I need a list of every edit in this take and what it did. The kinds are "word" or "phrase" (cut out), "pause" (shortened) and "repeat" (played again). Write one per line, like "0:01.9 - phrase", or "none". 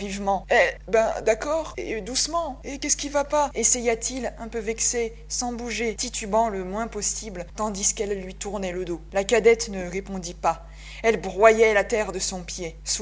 none